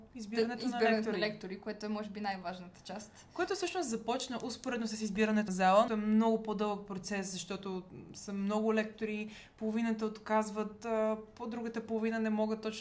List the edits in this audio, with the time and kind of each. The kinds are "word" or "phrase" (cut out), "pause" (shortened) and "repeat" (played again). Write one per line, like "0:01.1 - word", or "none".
0:05.5 - word
0:05.9 - phrase